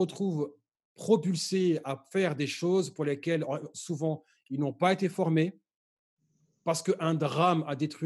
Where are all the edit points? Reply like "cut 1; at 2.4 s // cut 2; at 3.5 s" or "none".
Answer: none